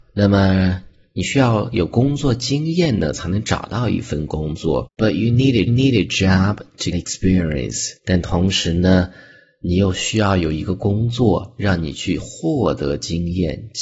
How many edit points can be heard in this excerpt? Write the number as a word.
four